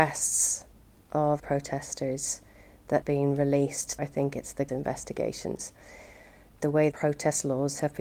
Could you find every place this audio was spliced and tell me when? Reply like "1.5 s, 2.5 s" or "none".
1.4 s, 3.0 s, 4.0 s, 4.7 s, 6.6 s, 6.9 s